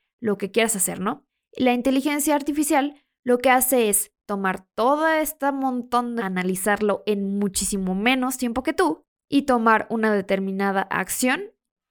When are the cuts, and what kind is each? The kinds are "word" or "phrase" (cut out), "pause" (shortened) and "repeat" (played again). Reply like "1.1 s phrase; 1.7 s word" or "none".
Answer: 6.2 s word